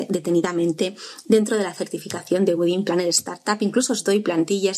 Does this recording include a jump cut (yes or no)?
no